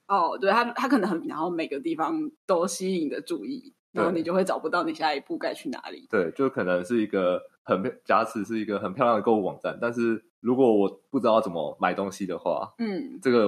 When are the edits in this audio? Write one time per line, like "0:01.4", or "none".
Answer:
0:01.2
0:02.4
0:07.6
0:10.3
0:11.1